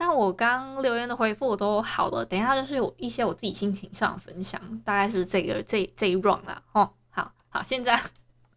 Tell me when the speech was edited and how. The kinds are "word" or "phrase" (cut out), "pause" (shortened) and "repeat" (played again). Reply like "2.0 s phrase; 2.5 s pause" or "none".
none